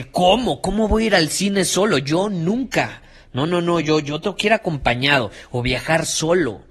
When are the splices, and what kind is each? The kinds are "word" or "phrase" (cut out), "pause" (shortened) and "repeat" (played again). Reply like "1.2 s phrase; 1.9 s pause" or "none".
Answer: none

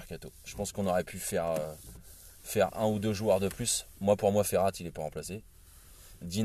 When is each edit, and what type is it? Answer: none

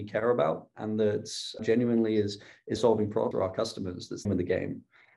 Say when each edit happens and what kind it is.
1.6 s word; 2.8 s phrase; 3.3 s word; 4.3 s word

